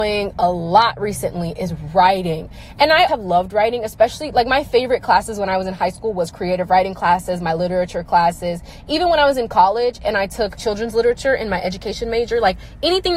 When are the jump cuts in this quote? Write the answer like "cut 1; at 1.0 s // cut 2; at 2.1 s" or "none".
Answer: cut 1; at 3.1 s // cut 2; at 10.6 s